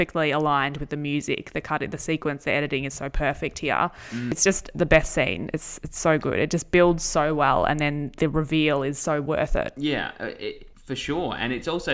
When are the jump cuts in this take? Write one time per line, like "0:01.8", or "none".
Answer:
0:10.7